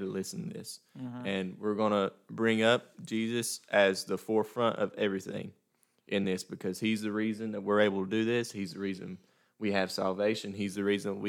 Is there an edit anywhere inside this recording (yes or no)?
no